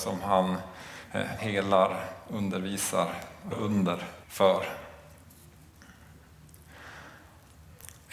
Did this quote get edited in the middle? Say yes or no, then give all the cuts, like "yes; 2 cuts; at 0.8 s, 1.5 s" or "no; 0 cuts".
yes; 3 cuts; at 1.4 s, 3.5 s, 4.2 s